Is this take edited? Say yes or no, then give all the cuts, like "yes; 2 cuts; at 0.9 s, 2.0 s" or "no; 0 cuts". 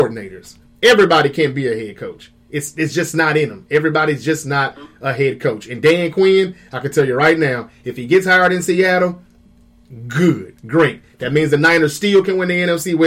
no; 0 cuts